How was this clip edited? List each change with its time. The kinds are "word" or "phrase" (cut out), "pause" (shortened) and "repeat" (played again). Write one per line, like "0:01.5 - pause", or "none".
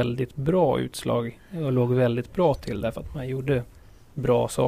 none